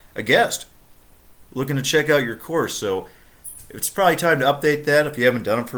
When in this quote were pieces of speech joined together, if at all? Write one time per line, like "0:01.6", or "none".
0:01.4